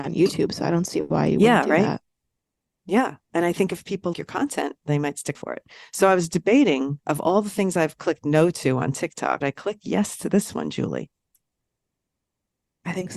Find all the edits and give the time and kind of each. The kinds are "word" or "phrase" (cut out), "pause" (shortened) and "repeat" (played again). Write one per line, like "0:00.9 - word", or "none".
0:04.1 - word
0:05.3 - word
0:09.4 - word